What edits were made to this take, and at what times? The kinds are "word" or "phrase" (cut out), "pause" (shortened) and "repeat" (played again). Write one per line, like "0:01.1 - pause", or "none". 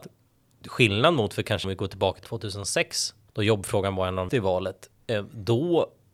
0:01.6 - word
0:02.2 - word
0:03.3 - word
0:04.3 - word